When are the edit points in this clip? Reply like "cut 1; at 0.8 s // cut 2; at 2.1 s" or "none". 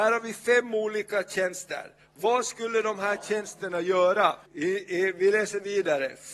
cut 1; at 4.5 s